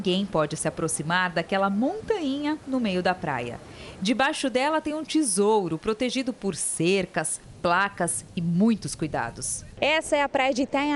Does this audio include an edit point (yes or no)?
no